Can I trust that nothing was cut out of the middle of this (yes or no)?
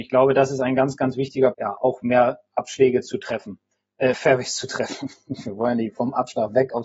no